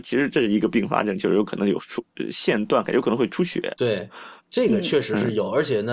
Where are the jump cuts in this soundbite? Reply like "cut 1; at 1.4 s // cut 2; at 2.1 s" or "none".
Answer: cut 1; at 4.4 s